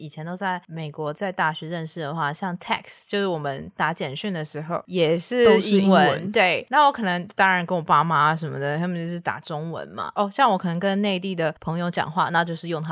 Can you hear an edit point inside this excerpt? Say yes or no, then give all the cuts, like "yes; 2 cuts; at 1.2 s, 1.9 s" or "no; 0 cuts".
no; 0 cuts